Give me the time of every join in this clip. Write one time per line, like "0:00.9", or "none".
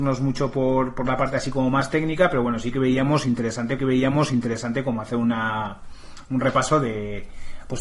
0:03.8